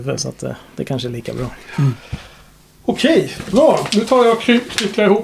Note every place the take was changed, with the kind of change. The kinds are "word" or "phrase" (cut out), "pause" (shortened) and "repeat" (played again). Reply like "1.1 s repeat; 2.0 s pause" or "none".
none